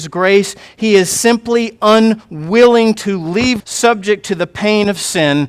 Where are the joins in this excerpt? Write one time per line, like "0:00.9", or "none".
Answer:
0:03.6